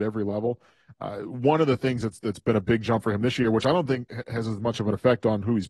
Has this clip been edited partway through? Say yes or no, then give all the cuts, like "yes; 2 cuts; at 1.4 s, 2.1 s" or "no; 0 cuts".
no; 0 cuts